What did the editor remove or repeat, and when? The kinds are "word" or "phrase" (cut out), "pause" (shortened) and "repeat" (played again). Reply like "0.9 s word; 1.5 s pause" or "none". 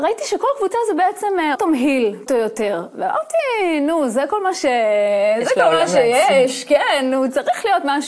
1.5 s word; 2.3 s word